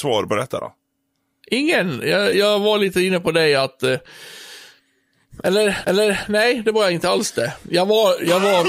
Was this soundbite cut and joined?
yes; 2 cuts; at 2.3 s, 5.8 s

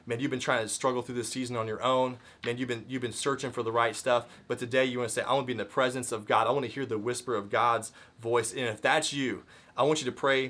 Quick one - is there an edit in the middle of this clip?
no; 0 cuts

